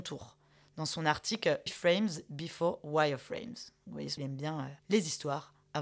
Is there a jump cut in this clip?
yes; 3 cuts; at 1.7 s, 4.2 s, 4.8 s

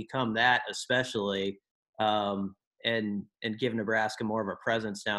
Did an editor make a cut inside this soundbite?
no; 0 cuts

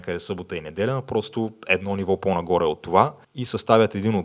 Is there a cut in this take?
yes; 1 cut; at 3.2 s

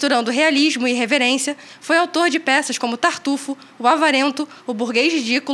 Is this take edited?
no; 0 cuts

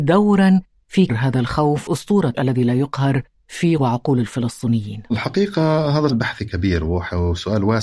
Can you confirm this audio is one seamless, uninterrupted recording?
no; 5 cuts; at 1.1 s, 1.9 s, 2.3 s, 3.8 s, 6.1 s

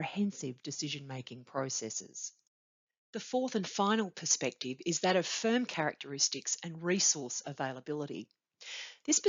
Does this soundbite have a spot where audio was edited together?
no; 0 cuts

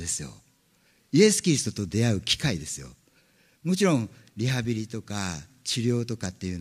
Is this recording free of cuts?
yes; 0 cuts

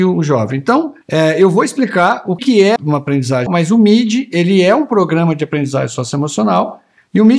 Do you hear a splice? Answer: yes; 4 cuts; at 1.0 s, 2.4 s, 2.8 s, 3.5 s

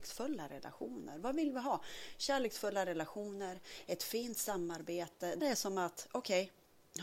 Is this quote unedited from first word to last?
no; 1 cut; at 5.4 s

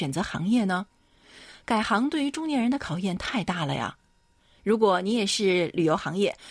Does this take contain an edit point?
no; 0 cuts

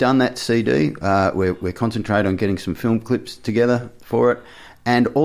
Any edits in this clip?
no; 0 cuts

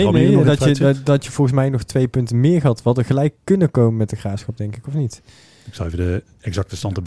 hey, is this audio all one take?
yes; 0 cuts

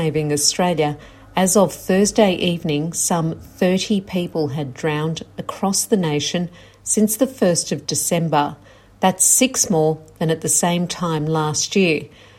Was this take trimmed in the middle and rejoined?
no; 0 cuts

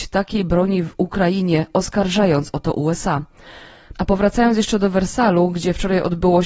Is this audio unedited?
yes; 0 cuts

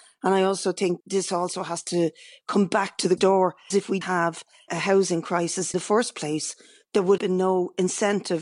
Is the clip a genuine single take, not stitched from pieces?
no; 7 cuts; at 1.0 s, 3.2 s, 3.7 s, 4.0 s, 4.7 s, 5.7 s, 7.2 s

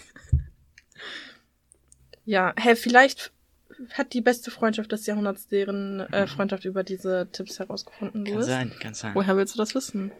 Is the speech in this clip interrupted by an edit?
no; 0 cuts

